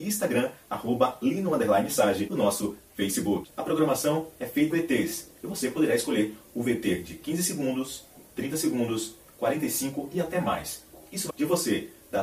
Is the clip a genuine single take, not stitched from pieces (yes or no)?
no